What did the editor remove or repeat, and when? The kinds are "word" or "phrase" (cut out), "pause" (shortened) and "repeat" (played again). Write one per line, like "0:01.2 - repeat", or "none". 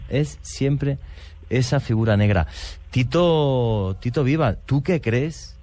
0:04.6 - word